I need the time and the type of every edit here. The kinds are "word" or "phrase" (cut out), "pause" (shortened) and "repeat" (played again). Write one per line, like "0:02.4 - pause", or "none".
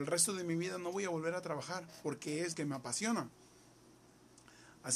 0:02.5 - word